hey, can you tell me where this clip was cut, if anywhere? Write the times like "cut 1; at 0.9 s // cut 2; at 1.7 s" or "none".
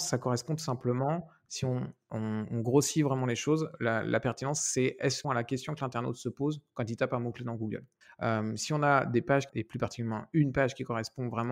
cut 1; at 5.2 s // cut 2; at 8.0 s